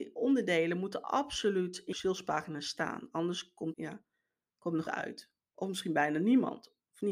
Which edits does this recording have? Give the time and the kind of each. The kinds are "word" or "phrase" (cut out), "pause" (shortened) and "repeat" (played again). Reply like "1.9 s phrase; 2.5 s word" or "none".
1.9 s word; 3.7 s word; 4.9 s phrase